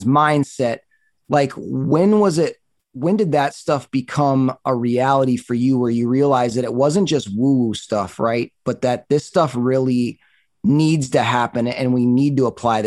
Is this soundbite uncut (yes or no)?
yes